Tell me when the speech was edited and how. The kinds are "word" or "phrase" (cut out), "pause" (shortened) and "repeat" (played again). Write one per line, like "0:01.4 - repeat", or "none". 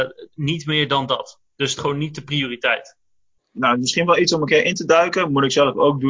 0:01.8 - word
0:03.6 - word